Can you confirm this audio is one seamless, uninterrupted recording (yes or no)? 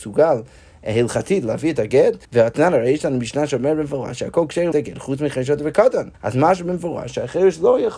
no